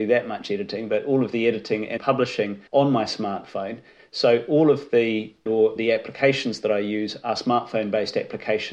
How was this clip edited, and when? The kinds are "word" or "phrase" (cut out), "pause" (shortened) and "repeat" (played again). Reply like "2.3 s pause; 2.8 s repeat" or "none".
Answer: 2.0 s word; 2.7 s pause; 5.5 s phrase; 5.8 s word